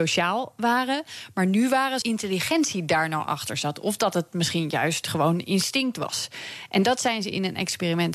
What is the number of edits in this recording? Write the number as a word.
one